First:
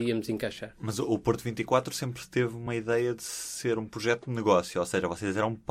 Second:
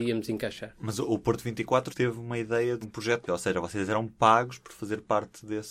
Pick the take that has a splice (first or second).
second